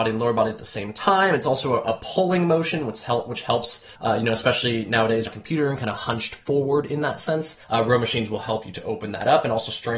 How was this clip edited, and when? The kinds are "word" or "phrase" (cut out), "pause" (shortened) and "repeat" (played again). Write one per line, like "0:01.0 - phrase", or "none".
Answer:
0:04.0 - pause
0:05.3 - phrase
0:07.6 - pause